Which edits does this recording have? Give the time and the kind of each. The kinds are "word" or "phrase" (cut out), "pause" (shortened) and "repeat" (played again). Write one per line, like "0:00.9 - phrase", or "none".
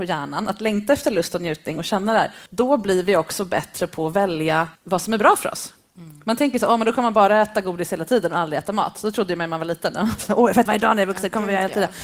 0:02.5 - pause
0:04.8 - pause
0:10.7 - word